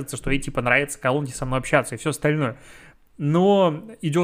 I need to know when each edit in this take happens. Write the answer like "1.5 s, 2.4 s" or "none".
none